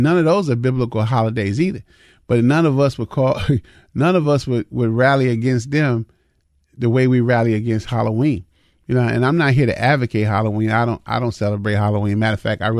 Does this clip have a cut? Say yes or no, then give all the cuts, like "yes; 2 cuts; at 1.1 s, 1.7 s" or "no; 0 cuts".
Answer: no; 0 cuts